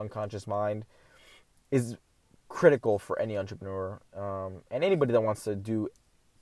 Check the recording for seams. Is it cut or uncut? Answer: uncut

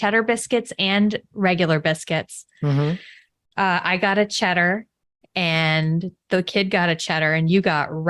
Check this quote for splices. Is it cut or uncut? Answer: uncut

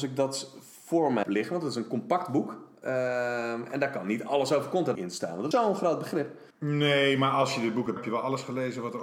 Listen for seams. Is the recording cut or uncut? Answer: cut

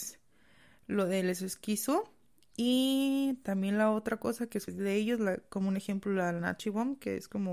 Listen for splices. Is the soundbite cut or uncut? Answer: cut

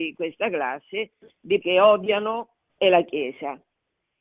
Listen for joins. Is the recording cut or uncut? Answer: cut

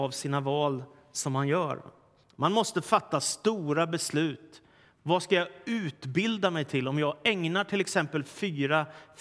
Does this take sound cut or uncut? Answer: uncut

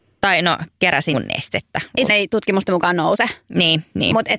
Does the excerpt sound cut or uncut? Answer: cut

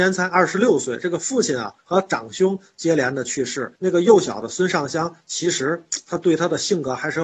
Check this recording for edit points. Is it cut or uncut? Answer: cut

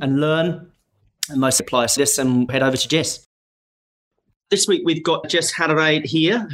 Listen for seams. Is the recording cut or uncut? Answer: cut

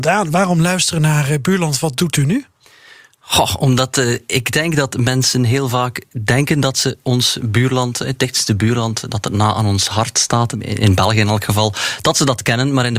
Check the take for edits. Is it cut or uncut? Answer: cut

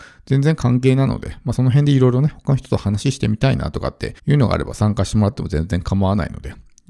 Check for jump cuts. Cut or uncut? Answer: cut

